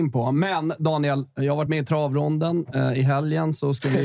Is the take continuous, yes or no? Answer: yes